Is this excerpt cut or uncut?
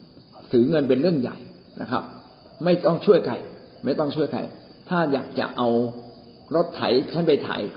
uncut